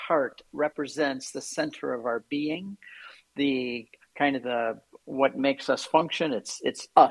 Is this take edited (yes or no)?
no